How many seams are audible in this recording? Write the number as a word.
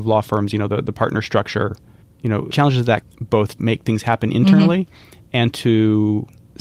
four